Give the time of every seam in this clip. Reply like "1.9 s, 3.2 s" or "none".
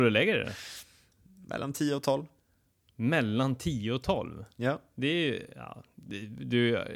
none